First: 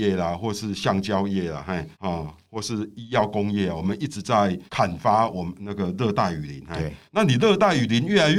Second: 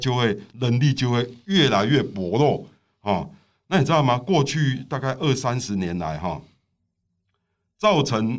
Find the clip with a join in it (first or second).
first